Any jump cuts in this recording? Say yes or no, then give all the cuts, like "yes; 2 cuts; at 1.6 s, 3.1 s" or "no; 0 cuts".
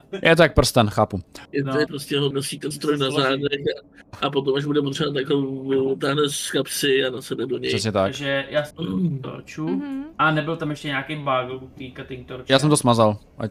yes; 6 cuts; at 1.5 s, 1.9 s, 2.3 s, 2.7 s, 8.7 s, 10.1 s